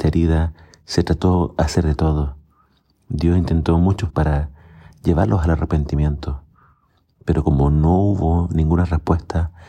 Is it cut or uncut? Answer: cut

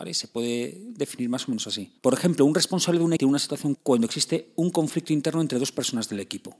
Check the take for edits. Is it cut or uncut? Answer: cut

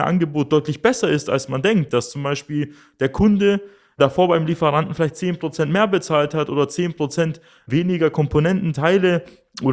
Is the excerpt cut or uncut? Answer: uncut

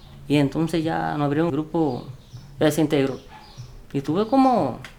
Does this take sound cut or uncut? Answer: cut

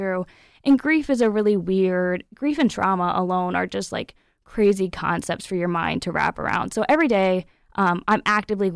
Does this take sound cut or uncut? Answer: uncut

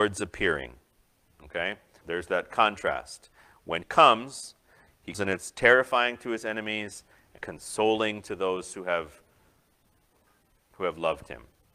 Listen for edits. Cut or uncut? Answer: cut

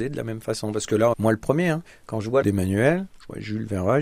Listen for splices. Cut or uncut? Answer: cut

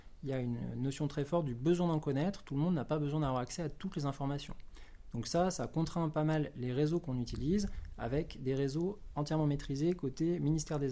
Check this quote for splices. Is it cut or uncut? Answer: uncut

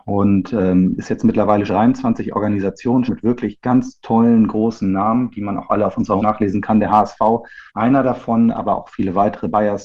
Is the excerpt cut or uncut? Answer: cut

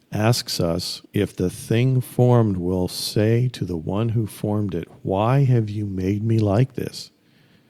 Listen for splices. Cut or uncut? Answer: cut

